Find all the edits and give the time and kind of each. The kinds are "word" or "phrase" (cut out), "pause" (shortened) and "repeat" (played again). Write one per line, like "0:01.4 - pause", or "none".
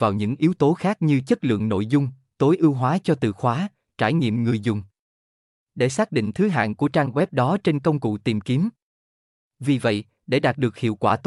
none